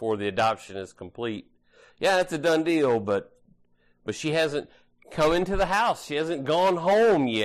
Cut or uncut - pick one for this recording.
uncut